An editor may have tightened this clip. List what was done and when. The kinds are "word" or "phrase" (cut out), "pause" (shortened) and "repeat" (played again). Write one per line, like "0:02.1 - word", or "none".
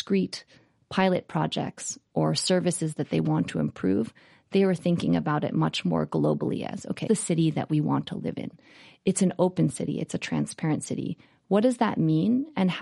0:07.1 - phrase